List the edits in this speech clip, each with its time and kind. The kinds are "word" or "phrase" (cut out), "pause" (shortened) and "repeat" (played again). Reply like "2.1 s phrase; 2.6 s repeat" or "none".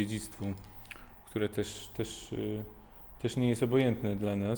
none